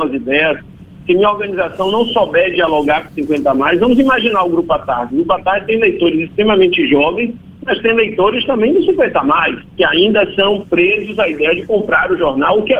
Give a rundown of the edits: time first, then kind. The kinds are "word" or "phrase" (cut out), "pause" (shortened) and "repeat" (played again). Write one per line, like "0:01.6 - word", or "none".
0:09.7 - pause